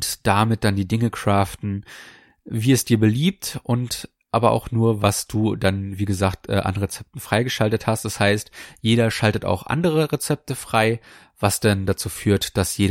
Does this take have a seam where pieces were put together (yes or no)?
no